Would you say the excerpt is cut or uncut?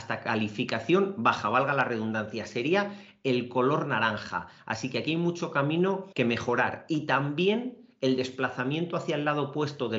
cut